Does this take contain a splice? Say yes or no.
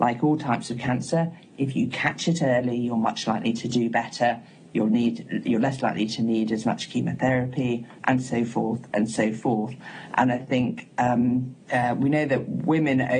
no